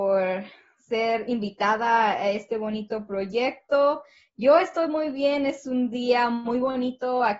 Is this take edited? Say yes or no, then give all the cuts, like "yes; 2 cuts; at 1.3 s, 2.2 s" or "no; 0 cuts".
no; 0 cuts